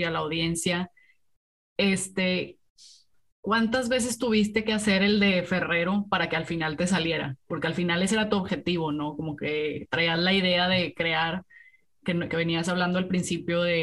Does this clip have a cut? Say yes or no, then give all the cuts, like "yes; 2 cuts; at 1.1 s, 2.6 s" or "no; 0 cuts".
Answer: no; 0 cuts